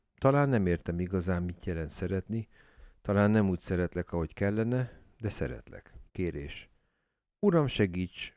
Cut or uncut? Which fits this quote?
cut